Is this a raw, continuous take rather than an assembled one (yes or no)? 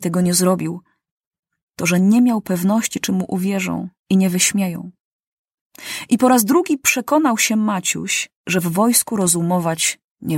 no